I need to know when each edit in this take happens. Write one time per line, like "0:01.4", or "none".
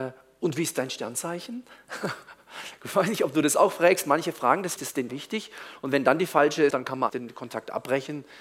0:04.8
0:05.1
0:06.7
0:07.1

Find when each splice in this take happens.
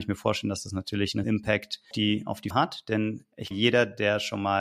0:01.2
0:01.9
0:02.5
0:03.5

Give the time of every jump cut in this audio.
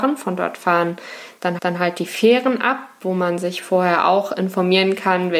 0:01.6

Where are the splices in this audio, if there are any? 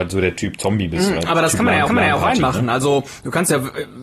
0:01.9

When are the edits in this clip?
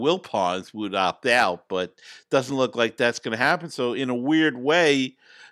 none

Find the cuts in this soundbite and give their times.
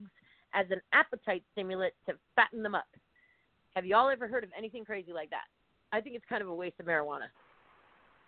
none

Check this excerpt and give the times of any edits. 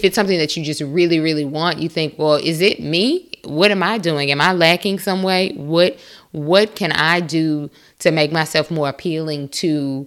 none

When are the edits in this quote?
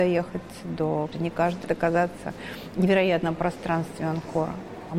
0:01.1
0:01.6
0:02.8

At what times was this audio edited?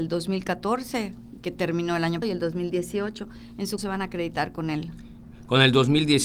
0:02.2
0:03.8

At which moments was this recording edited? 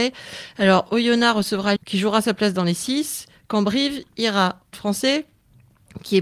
0:01.8
0:04.7

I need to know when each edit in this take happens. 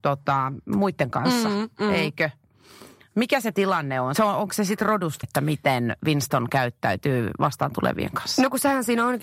0:01.1
0:04.2
0:05.2

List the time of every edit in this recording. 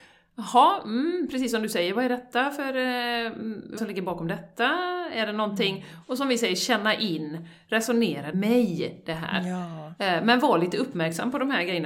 0:03.8
0:08.3

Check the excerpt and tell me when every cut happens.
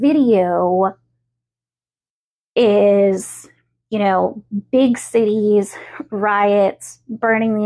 none

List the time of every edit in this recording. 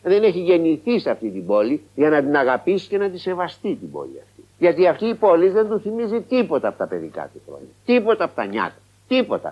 none

